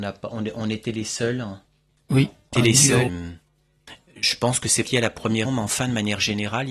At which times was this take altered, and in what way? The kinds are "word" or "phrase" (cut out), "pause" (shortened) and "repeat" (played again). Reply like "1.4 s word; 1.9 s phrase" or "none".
2.5 s word; 3.1 s word; 4.9 s word; 5.5 s word